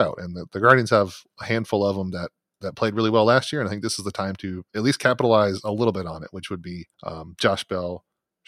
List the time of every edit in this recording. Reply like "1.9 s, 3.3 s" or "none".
6.9 s